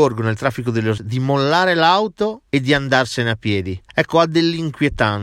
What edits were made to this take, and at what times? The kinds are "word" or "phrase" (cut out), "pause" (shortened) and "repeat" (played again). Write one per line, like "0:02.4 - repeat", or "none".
0:01.0 - word
0:02.5 - pause
0:03.9 - pause